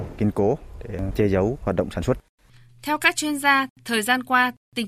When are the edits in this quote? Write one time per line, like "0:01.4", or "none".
none